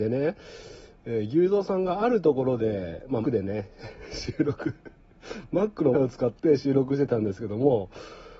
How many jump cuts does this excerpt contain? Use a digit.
2